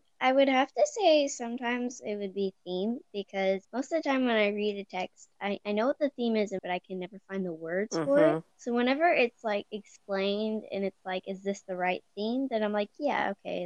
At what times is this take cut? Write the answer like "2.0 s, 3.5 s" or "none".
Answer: 3.6 s, 6.6 s, 8.5 s